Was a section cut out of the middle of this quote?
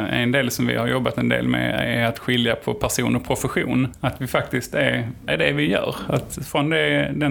yes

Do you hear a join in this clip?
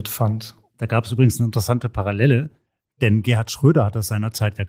no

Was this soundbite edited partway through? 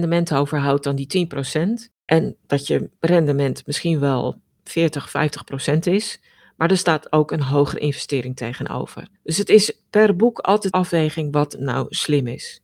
yes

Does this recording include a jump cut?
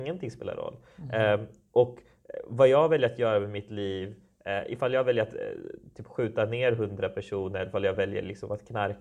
no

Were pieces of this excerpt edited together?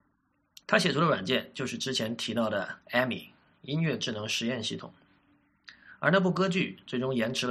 yes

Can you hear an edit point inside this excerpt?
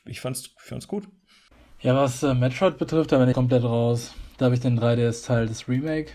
yes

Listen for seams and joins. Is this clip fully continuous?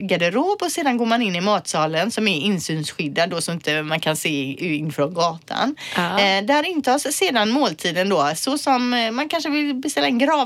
yes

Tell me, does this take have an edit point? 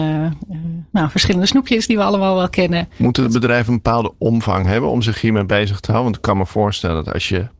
no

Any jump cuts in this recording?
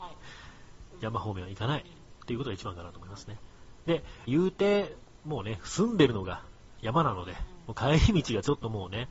yes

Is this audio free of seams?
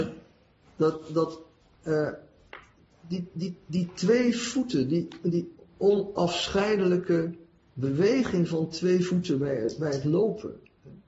yes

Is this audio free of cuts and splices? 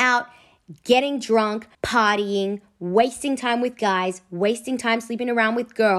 no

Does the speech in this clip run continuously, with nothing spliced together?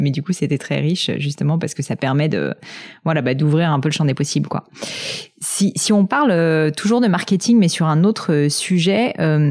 yes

